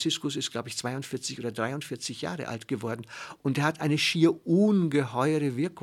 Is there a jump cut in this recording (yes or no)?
no